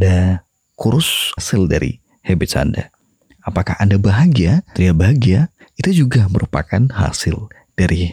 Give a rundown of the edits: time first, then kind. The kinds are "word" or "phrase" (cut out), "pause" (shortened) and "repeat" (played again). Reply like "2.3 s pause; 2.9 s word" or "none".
1.4 s phrase; 4.7 s word